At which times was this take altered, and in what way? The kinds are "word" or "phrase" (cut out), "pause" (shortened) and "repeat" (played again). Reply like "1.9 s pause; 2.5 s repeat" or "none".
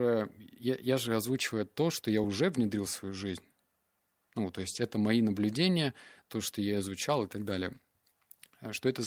none

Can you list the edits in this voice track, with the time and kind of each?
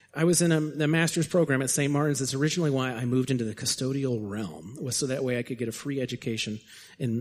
none

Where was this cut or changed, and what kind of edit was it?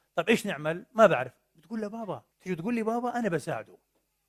2.3 s pause

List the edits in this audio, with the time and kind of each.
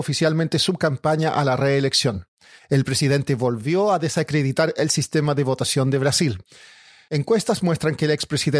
none

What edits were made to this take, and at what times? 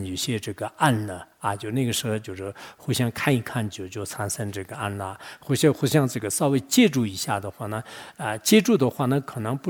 none

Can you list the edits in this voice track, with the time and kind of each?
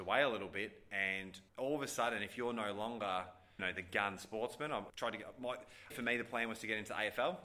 1.5 s pause; 3.6 s word; 4.9 s phrase; 5.9 s word

